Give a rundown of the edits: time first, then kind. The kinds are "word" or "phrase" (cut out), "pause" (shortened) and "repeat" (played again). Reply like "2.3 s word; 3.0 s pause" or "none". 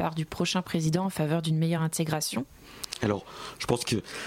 none